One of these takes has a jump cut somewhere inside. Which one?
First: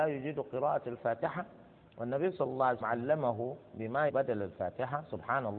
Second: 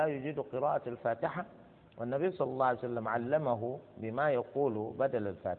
first; 2 cuts; at 2.8 s, 4.1 s

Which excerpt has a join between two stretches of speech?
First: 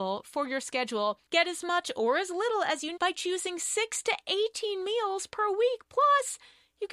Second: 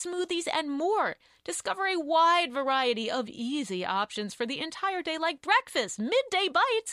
first; 2 cuts; at 1.3 s, 3.0 s

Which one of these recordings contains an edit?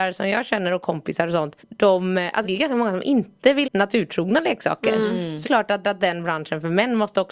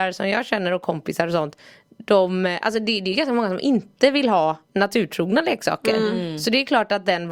first; 5 cuts; at 1.6 s, 2.4 s, 3.6 s, 5.4 s, 5.8 s

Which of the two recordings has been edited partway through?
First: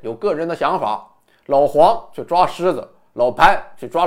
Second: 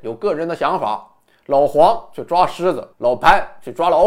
second; 1 cut; at 2.9 s

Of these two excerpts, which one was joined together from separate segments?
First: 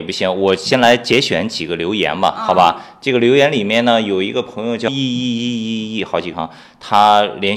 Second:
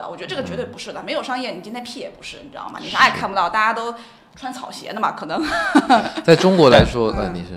first; 2 cuts; at 4.9 s, 6.3 s

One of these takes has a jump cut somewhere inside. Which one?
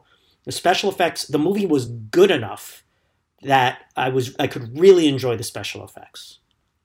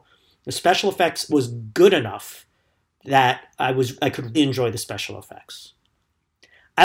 second; 2 cuts; at 1.3 s, 4.3 s

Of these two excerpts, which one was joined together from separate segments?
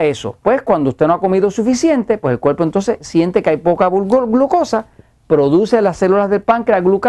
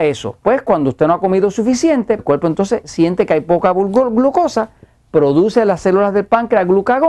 second; 1 cut; at 2.2 s

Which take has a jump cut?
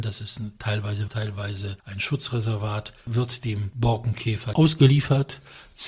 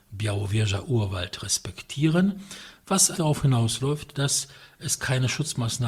first; 4 cuts; at 1.1 s, 1.8 s, 3.0 s, 4.5 s

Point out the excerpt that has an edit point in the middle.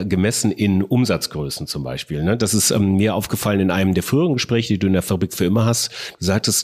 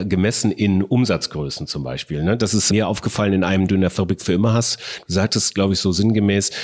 second; 2 cuts; at 2.7 s, 3.7 s

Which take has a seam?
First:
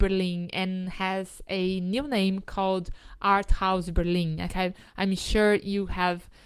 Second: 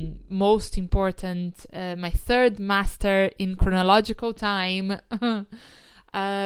first; 1 cut; at 4.5 s

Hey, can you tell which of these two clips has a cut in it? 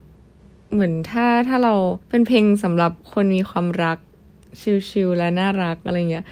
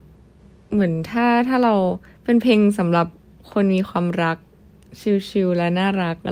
first; 2 cuts; at 2.0 s, 3.0 s

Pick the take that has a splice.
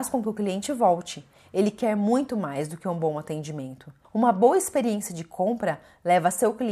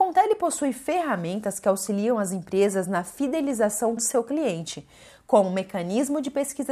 second; 1 cut; at 4.0 s

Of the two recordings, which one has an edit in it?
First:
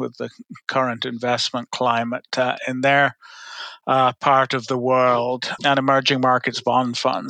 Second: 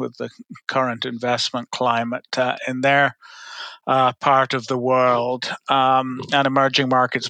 first; 1 cut; at 5.6 s

